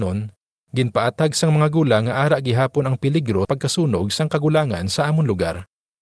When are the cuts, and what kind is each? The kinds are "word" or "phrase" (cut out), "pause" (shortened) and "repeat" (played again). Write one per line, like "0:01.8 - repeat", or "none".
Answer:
0:03.4 - word